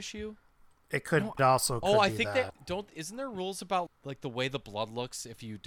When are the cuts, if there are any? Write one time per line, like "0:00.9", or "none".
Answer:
0:01.4
0:02.5
0:03.9

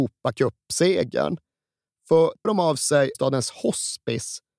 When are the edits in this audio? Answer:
0:02.4
0:03.1

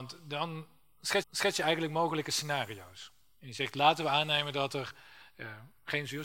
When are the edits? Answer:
0:01.2

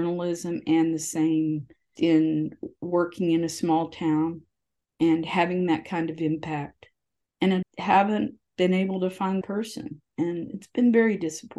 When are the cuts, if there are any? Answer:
0:02.0
0:07.6
0:09.4

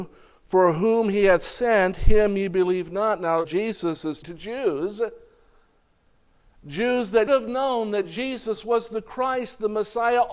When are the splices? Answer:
0:03.4
0:04.2
0:07.3

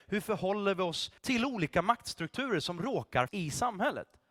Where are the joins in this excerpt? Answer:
0:01.2
0:03.3

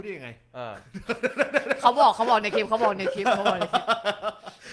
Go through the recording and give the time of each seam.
none

